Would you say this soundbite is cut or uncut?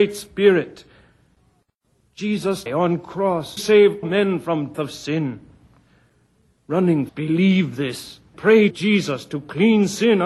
cut